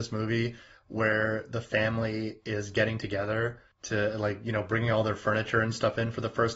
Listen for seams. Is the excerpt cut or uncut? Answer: cut